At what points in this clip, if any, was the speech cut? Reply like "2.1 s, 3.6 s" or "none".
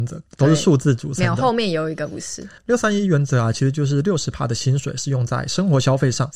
2.6 s